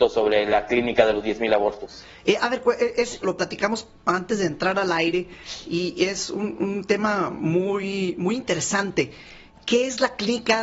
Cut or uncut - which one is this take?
cut